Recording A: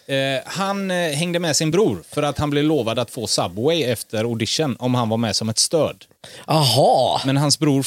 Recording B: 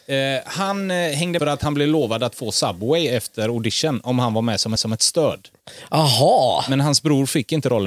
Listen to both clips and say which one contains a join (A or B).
B